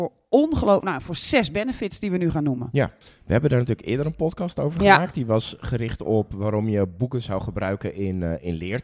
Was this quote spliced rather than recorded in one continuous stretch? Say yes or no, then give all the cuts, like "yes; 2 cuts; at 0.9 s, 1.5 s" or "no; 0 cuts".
yes; 1 cut; at 3.0 s